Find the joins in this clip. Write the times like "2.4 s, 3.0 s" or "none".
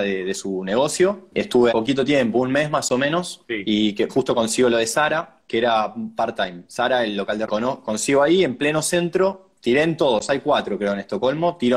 1.7 s, 4.1 s, 7.5 s, 9.6 s